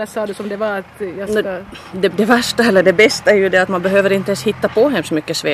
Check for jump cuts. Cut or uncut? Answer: cut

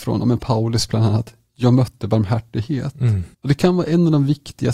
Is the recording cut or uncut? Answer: cut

